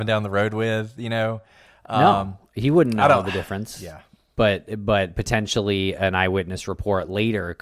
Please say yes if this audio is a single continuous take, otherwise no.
yes